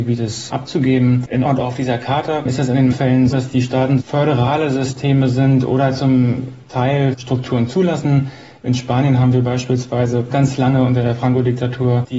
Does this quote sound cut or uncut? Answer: cut